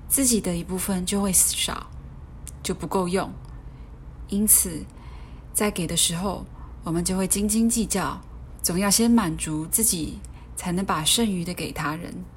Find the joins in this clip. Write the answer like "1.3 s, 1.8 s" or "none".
8.6 s